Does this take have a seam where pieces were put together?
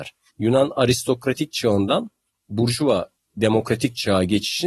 no; 0 cuts

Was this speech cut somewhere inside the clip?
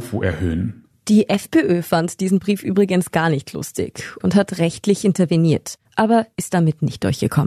yes; 1 cut; at 5.8 s

